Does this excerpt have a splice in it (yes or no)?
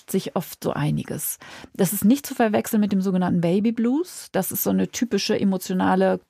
no